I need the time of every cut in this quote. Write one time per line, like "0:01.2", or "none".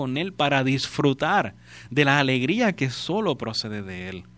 none